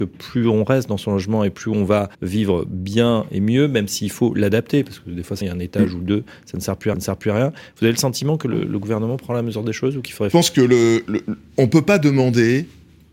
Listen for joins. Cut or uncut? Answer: cut